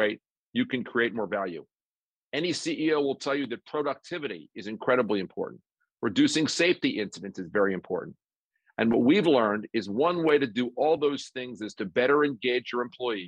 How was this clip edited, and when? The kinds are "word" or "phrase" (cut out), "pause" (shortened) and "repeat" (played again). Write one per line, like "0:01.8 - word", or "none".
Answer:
none